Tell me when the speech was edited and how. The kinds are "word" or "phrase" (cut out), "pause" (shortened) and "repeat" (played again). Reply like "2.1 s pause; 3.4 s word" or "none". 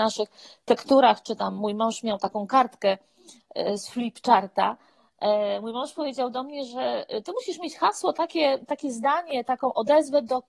none